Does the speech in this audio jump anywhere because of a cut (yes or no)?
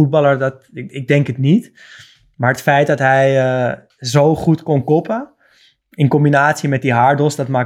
no